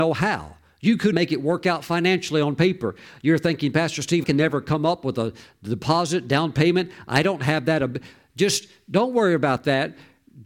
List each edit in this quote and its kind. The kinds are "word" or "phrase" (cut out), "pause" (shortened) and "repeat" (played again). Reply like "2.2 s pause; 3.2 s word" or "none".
1.1 s word; 4.2 s word